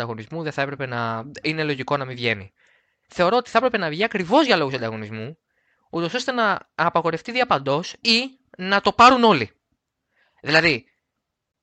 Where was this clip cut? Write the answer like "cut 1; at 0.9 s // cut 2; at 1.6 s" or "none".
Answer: none